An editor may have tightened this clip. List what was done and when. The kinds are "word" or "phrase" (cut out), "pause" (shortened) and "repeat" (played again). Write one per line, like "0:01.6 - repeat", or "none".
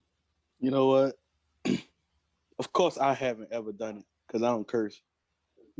none